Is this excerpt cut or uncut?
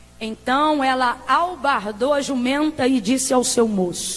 uncut